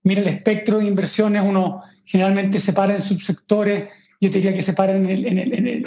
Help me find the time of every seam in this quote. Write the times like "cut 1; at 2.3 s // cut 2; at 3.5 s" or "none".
none